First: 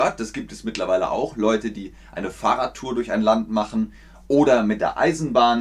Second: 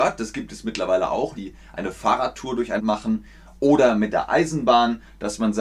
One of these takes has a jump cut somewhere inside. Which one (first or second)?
second